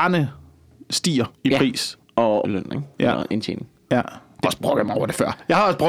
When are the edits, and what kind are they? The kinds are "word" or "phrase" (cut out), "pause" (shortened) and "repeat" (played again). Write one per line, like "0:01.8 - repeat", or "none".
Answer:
0:01.4 - pause
0:02.4 - word
0:02.9 - pause
0:04.4 - phrase